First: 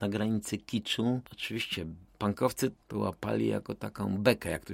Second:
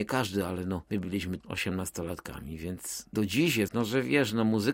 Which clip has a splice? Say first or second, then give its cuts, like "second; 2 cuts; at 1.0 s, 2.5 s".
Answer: second; 3 cuts; at 1.4 s, 3.1 s, 3.7 s